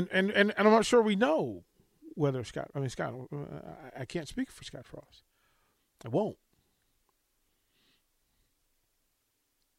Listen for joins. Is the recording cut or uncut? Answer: uncut